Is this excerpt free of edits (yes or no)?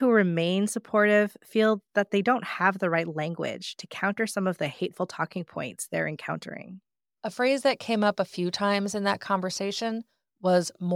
yes